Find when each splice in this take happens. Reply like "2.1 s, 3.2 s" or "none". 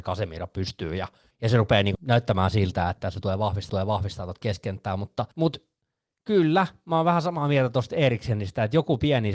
1.3 s, 1.9 s, 3.7 s, 5.3 s